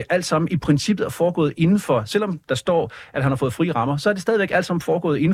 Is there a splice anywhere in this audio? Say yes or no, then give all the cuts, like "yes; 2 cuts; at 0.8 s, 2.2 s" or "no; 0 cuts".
no; 0 cuts